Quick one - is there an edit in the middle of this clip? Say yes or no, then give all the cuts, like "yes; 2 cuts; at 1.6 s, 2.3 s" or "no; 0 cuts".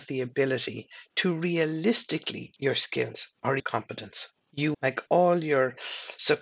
yes; 3 cuts; at 2.6 s, 3.6 s, 4.7 s